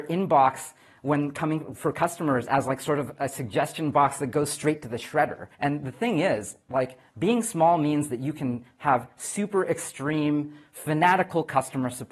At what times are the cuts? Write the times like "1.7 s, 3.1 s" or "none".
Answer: 5.5 s